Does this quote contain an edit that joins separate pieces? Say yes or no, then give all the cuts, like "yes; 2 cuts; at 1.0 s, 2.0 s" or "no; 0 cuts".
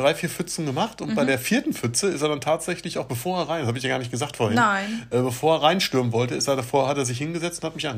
no; 0 cuts